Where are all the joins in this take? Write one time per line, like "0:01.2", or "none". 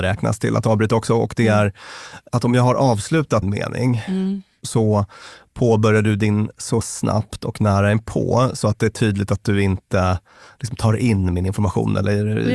0:03.4
0:06.8

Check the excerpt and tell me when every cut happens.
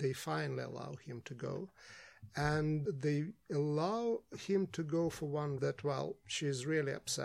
0:02.9
0:05.6

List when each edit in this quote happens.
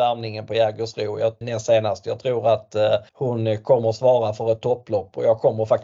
0:01.4
0:03.1

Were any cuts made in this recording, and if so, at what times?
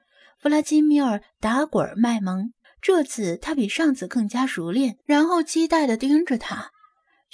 0:02.6
0:05.0

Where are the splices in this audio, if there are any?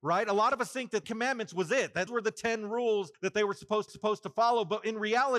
0:01.0
0:02.1
0:03.1
0:03.9

